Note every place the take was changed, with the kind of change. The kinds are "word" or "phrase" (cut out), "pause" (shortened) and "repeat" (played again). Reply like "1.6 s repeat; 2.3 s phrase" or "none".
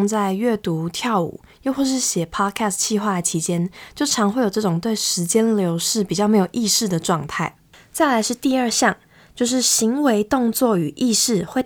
none